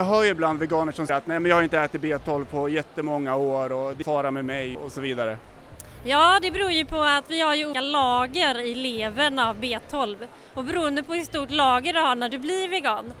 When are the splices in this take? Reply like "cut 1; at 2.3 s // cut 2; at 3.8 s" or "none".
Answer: cut 1; at 1.1 s // cut 2; at 4.0 s // cut 3; at 4.8 s // cut 4; at 7.7 s